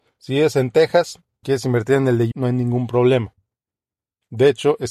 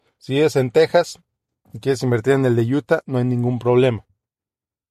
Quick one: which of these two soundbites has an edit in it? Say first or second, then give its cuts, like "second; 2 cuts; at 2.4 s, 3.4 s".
first; 2 cuts; at 1.4 s, 2.3 s